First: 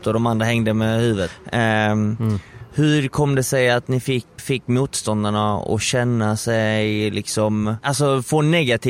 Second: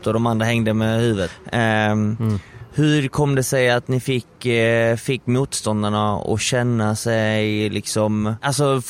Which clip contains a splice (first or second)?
first